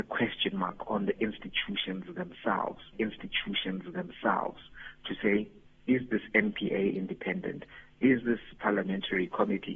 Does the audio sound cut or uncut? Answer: cut